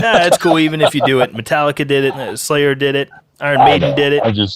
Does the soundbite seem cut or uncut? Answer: uncut